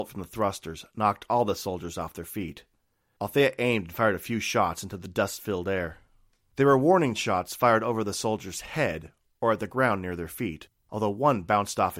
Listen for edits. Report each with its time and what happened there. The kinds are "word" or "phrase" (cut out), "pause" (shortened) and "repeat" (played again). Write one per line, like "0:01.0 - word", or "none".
none